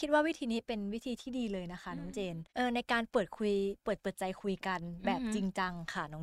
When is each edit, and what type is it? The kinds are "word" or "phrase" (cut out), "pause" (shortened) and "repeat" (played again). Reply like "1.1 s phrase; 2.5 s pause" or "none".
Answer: 2.5 s pause